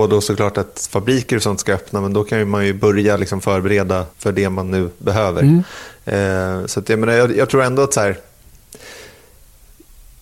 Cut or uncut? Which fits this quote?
cut